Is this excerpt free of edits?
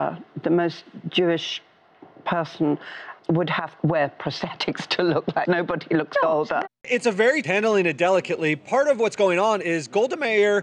no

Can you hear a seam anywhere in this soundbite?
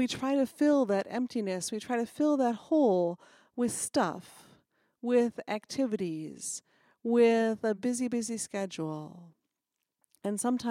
no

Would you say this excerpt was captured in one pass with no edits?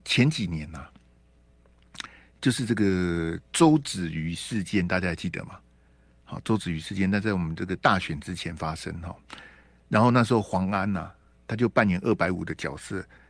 yes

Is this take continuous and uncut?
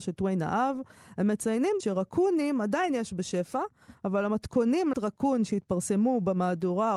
no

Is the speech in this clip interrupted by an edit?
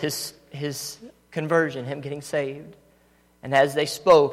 no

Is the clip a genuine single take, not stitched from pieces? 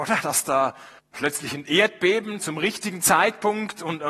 no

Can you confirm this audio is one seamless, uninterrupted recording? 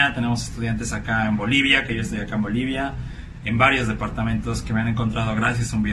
yes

